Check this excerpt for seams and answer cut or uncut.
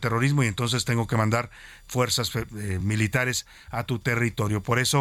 uncut